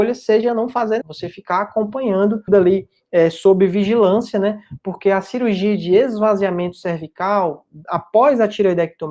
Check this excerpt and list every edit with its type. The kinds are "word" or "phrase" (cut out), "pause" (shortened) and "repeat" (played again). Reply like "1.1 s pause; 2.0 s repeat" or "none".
1.0 s word; 2.5 s word